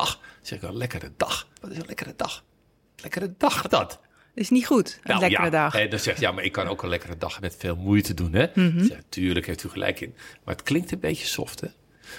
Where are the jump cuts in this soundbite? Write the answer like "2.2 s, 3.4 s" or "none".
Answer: 1.6 s, 3.7 s, 7.4 s